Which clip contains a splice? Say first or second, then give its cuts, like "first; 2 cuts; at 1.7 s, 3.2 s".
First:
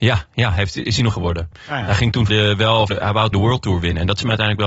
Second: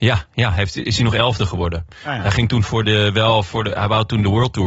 first; 4 cuts; at 1.1 s, 2.3 s, 2.9 s, 3.3 s